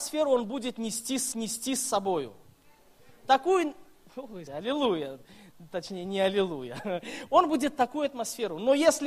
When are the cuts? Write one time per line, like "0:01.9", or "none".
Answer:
0:01.3
0:04.5

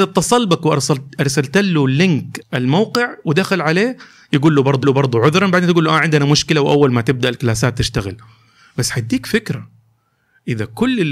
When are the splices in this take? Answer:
0:02.4
0:04.8

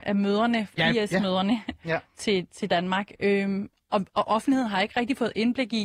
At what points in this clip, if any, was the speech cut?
none

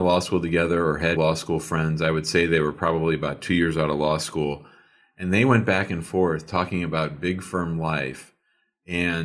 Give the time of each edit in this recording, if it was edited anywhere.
0:01.2

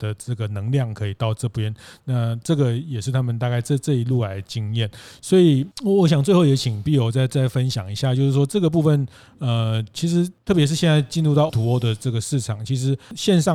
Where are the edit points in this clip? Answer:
0:11.5

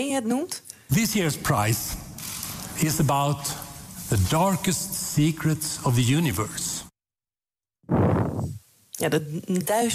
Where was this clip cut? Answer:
none

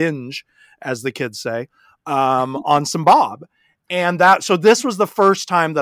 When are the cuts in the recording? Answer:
none

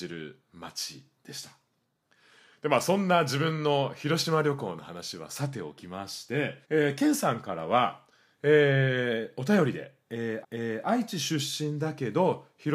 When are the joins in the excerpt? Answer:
0:06.6
0:10.4

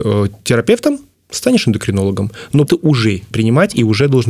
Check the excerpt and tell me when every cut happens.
0:02.7
0:03.3

